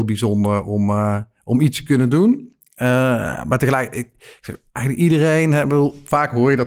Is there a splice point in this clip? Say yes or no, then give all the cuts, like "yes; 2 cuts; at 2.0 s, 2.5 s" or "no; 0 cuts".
yes; 1 cut; at 4.7 s